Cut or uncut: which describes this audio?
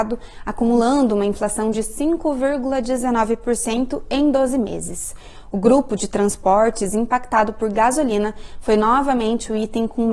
uncut